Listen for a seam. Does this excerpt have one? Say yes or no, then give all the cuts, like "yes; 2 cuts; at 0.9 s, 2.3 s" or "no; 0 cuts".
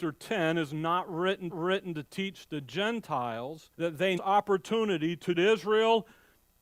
yes; 4 cuts; at 1.5 s, 3.7 s, 4.2 s, 5.3 s